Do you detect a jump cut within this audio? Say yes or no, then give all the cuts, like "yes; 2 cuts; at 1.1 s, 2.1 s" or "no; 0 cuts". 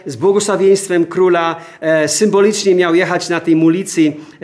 no; 0 cuts